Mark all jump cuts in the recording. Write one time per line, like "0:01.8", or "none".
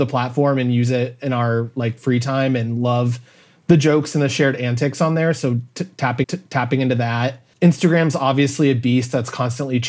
0:06.2
0:07.5

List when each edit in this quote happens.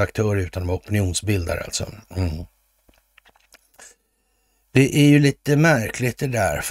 none

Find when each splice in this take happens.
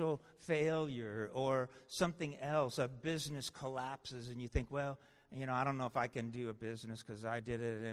none

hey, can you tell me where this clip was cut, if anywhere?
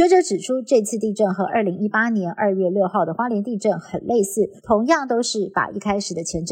0:04.6

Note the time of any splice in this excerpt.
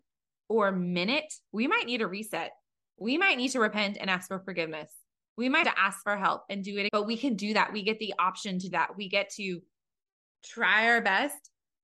0:05.6
0:06.9
0:08.7

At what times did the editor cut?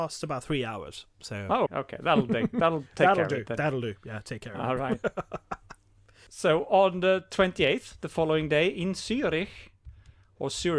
0:01.7

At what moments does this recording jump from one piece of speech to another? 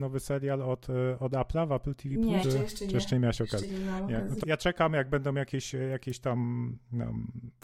0:02.4
0:04.4

